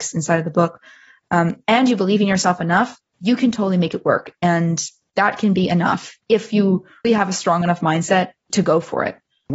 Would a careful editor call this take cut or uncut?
cut